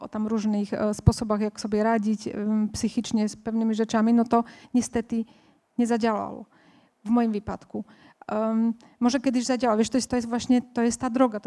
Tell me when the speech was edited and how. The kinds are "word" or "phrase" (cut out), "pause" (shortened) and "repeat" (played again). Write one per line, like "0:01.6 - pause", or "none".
0:10.1 - word

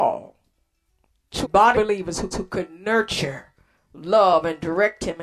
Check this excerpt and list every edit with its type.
0:01.4 - word
0:01.7 - word
0:02.3 - repeat

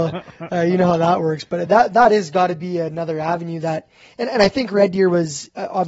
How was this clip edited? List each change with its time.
none

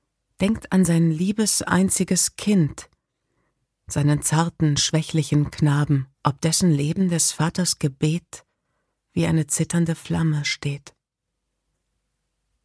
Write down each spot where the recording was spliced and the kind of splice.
0:06.1 - pause

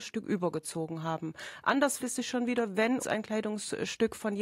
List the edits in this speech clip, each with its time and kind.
0:02.0 - word
0:03.0 - word

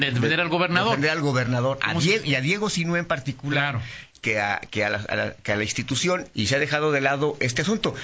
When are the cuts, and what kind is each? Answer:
0:06.3 - word

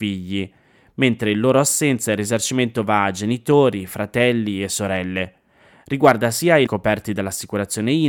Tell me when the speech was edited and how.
0:06.7 - word

